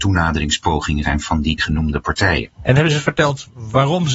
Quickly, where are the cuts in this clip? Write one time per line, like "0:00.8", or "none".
0:01.0
0:01.6
0:02.5